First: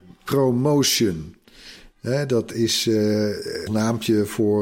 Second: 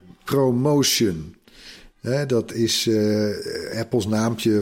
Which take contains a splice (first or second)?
first